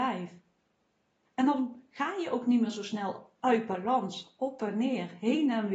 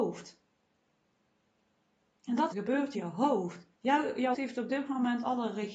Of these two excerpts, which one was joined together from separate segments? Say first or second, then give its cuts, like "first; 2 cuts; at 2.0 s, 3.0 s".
second; 4 cuts; at 2.5 s, 2.9 s, 3.7 s, 4.3 s